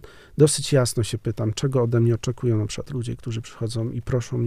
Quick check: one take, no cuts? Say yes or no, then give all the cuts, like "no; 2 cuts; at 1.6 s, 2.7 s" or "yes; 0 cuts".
yes; 0 cuts